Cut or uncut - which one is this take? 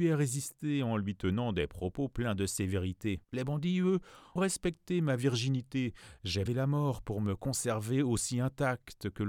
cut